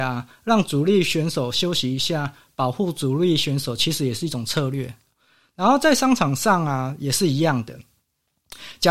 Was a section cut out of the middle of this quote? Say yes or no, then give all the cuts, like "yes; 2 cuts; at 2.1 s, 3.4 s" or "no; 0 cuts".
no; 0 cuts